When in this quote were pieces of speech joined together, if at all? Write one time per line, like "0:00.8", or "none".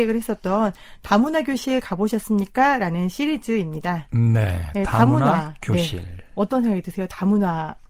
none